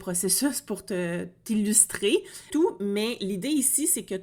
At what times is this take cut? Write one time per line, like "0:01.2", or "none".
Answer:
0:02.5